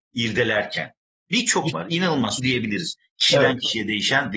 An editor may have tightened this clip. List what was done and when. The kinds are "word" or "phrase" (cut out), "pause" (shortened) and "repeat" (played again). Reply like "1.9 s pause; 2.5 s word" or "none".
1.7 s word; 2.4 s phrase